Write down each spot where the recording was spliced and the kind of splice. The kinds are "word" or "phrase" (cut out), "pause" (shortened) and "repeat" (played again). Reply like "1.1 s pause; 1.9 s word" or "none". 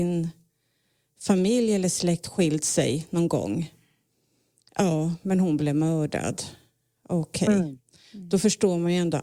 none